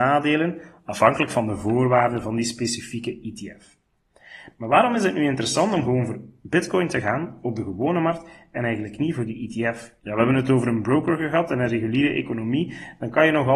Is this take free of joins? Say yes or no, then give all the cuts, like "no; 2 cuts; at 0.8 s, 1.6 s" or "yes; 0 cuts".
no; 1 cut; at 10.0 s